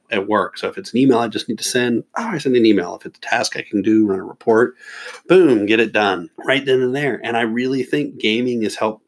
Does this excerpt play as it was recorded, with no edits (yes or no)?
no